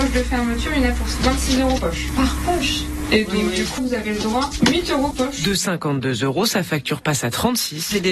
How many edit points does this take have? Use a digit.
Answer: 4